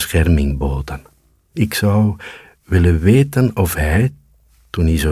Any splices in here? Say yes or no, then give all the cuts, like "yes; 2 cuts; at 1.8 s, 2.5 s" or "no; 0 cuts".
no; 0 cuts